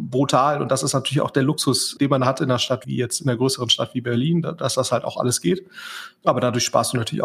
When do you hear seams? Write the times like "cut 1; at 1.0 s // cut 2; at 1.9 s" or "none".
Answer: cut 1; at 2.8 s